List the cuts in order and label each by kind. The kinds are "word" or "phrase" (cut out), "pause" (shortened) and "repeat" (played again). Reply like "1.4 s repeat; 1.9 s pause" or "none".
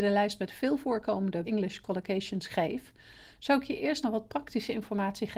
1.4 s word; 4.0 s word